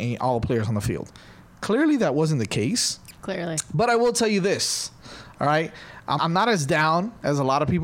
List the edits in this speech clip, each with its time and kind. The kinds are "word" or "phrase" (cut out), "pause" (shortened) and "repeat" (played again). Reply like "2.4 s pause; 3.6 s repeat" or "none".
3.2 s pause; 6.2 s word